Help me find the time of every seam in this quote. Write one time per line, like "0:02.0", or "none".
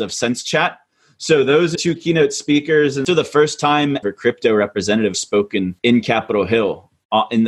0:01.7
0:03.1
0:04.0
0:05.1
0:05.8

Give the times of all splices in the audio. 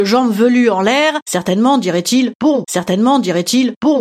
0:02.6

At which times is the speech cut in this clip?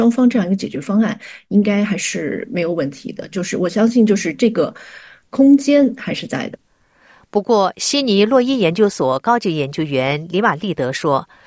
none

